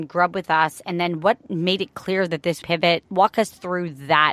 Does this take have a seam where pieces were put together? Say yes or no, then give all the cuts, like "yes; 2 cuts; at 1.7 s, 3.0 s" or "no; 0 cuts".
yes; 1 cut; at 2.6 s